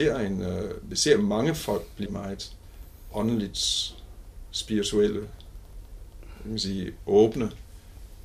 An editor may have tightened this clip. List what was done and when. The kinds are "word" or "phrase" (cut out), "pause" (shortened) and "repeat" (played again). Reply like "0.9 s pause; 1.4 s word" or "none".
2.1 s word